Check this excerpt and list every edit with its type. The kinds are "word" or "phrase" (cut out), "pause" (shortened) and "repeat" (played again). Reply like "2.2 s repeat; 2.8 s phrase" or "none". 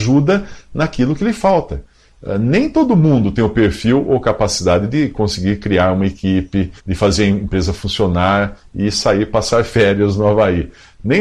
6.8 s pause